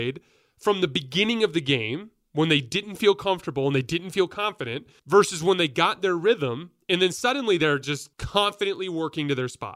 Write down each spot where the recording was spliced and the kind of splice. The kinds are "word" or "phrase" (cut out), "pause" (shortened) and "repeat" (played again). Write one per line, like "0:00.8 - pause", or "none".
0:05.0 - pause
0:08.1 - pause